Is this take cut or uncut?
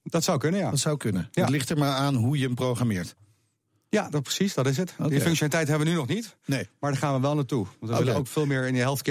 uncut